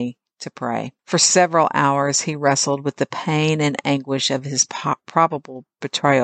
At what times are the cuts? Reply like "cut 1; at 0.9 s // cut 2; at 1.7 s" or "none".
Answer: cut 1; at 1.0 s